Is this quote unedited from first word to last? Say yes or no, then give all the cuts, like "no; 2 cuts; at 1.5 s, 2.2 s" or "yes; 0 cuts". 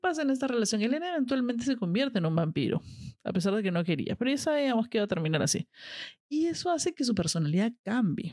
yes; 0 cuts